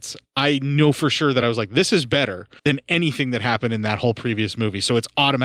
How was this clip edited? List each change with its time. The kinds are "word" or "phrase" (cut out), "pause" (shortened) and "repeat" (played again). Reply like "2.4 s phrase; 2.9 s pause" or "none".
none